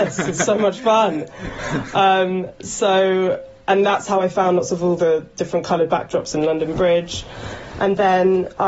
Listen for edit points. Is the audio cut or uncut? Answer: uncut